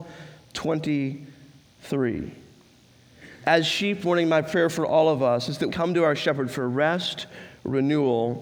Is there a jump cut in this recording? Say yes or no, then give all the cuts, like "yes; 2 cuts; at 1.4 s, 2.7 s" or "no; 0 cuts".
yes; 2 cuts; at 4.0 s, 5.7 s